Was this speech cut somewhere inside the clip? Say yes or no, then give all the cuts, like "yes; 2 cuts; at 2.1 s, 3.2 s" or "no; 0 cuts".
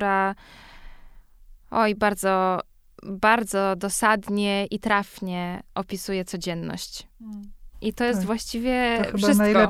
no; 0 cuts